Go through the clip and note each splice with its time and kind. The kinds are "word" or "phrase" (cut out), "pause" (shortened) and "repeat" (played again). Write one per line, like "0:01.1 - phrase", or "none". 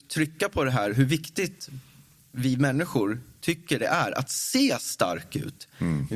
none